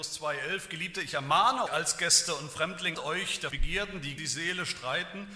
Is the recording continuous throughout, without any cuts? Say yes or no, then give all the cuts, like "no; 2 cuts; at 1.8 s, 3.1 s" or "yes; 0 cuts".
no; 4 cuts; at 1.7 s, 2.9 s, 3.5 s, 4.2 s